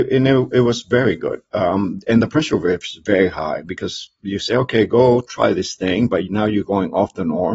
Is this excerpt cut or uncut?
uncut